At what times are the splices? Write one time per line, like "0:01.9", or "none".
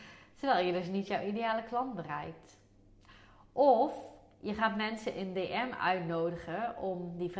none